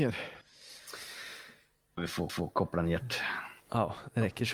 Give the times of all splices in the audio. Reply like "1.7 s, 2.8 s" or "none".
2.0 s, 2.3 s, 3.6 s

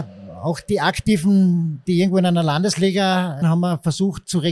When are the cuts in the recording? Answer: 3.4 s

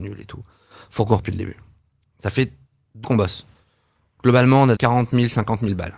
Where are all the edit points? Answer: 1.2 s, 3.0 s, 4.8 s

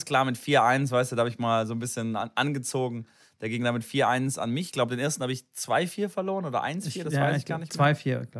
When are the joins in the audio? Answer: none

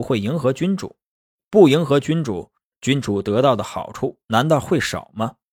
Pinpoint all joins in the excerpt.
none

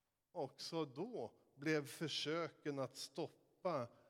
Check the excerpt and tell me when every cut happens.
none

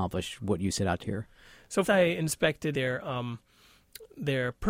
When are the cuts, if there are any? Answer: 1.0 s, 1.8 s, 2.7 s

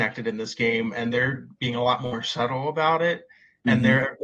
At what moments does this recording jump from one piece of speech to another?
none

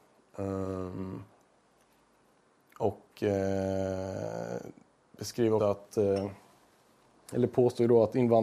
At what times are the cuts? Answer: 5.6 s

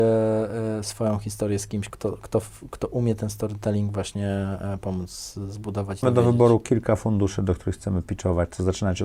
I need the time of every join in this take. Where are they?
1.9 s, 6.0 s

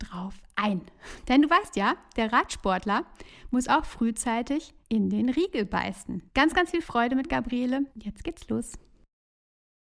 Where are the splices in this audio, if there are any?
4.8 s, 6.3 s, 7.9 s

